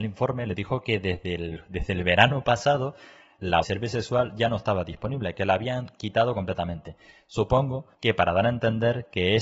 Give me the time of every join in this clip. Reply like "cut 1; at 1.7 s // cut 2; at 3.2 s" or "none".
cut 1; at 3.6 s // cut 2; at 7.9 s